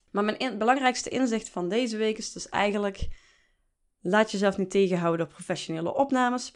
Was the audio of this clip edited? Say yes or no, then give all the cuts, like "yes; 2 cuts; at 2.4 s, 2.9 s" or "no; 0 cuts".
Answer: no; 0 cuts